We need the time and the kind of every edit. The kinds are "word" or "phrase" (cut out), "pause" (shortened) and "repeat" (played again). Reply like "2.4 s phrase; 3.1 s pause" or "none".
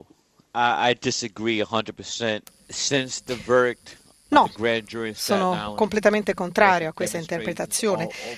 none